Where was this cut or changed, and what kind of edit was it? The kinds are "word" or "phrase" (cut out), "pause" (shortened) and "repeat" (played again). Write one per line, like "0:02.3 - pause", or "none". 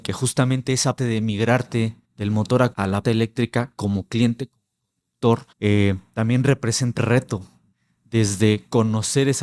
0:01.0 - word
0:02.0 - pause
0:02.7 - word
0:03.0 - word
0:05.5 - pause
0:07.0 - word
0:07.7 - pause